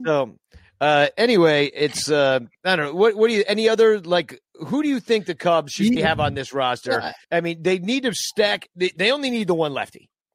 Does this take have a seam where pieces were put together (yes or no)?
yes